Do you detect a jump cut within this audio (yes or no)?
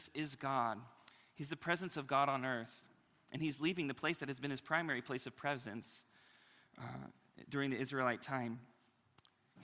no